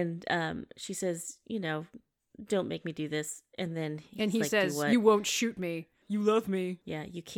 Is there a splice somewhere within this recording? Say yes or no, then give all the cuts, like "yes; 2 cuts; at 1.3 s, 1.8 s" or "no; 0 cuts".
no; 0 cuts